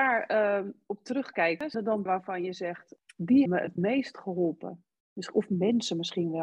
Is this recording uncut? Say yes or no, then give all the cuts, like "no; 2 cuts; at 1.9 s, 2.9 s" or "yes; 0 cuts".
no; 3 cuts; at 1.7 s, 2.1 s, 3.5 s